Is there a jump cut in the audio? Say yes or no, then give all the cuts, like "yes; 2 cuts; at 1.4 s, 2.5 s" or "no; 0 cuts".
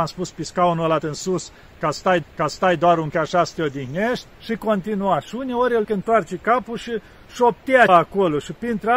yes; 6 cuts; at 1.0 s, 2.2 s, 3.1 s, 4.3 s, 5.8 s, 7.9 s